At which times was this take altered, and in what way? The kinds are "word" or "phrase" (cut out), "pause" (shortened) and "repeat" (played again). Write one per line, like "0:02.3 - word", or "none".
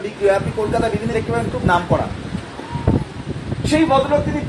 0:01.1 - word
0:01.5 - word